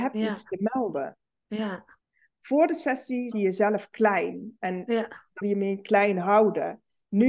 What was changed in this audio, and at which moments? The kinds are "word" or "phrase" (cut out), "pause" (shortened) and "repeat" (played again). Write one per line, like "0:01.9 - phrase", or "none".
0:02.0 - pause
0:03.3 - word
0:05.4 - word